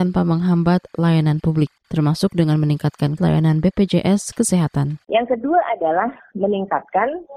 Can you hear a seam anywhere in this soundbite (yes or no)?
yes